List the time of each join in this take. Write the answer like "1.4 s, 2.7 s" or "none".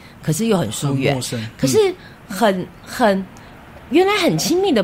2.2 s

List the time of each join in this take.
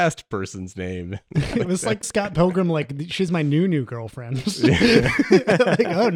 2.0 s

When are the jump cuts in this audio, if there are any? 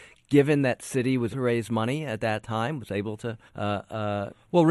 1.3 s, 3.5 s

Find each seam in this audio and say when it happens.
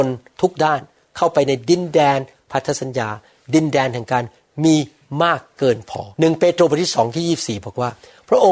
6.1 s

